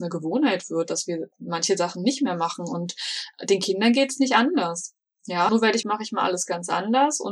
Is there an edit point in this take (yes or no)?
yes